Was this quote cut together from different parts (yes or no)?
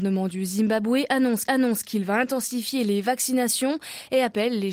yes